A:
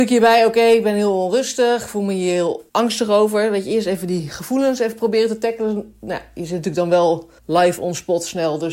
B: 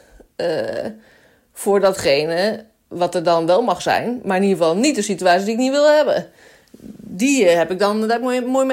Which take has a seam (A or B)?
A